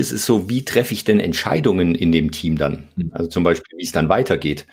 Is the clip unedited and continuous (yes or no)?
yes